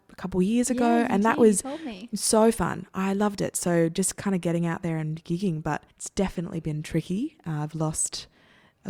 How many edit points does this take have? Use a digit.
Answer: 1